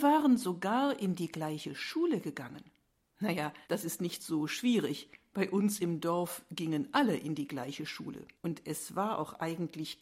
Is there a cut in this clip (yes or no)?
yes